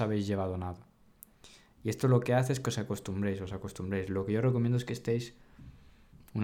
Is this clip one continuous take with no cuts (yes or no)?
yes